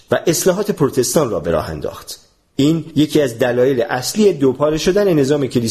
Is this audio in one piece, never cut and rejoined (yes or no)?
yes